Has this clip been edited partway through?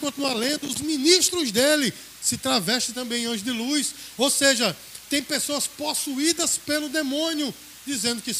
no; 0 cuts

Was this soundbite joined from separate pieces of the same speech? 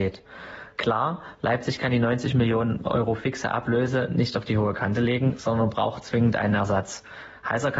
no; 0 cuts

